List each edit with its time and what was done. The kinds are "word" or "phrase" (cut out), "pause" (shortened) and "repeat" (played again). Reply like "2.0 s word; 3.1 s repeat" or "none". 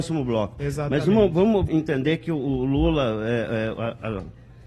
1.7 s word